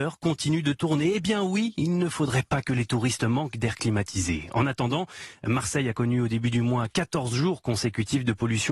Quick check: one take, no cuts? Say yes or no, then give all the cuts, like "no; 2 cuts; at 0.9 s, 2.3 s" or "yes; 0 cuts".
yes; 0 cuts